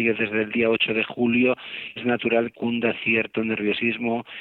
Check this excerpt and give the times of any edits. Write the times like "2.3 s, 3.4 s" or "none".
2.0 s, 2.5 s